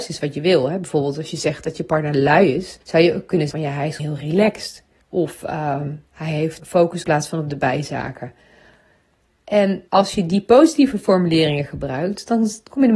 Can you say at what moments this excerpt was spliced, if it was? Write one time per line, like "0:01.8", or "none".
0:02.8
0:03.5
0:04.0
0:05.0
0:06.6
0:07.0
0:09.9